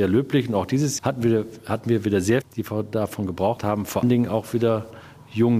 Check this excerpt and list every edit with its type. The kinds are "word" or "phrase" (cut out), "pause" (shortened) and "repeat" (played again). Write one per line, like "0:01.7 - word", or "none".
0:01.0 - word
0:02.4 - word
0:03.6 - word
0:04.0 - word